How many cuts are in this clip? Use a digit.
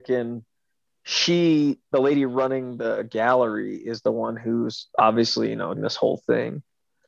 1